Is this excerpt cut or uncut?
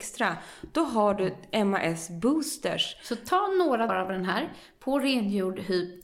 cut